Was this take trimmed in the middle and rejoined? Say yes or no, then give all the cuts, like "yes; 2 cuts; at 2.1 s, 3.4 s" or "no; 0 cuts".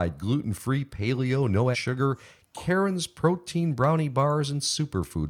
yes; 1 cut; at 1.7 s